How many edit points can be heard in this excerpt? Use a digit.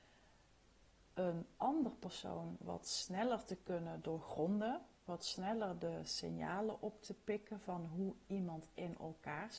1